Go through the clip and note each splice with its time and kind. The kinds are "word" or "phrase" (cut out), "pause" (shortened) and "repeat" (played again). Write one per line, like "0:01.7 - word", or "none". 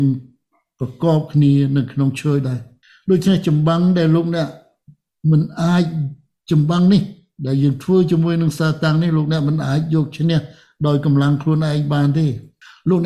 none